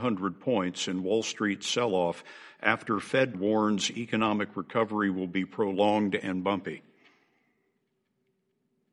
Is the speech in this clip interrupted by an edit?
yes; 1 cut; at 3.3 s

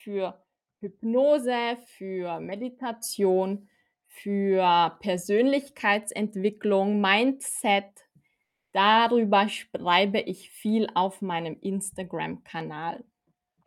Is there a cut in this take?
no; 0 cuts

